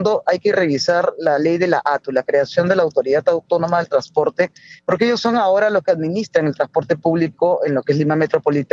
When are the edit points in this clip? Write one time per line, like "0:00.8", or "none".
0:04.8